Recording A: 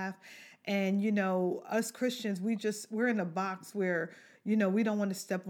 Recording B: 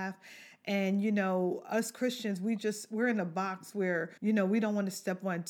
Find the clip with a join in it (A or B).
B